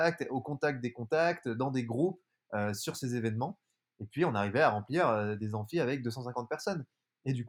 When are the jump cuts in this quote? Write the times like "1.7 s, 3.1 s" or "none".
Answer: none